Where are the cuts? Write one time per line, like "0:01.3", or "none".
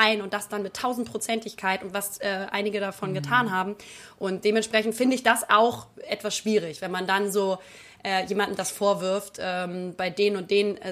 none